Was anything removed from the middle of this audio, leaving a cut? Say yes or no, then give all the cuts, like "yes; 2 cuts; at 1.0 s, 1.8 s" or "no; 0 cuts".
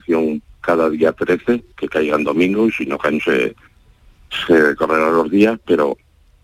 yes; 2 cuts; at 1.7 s, 3.2 s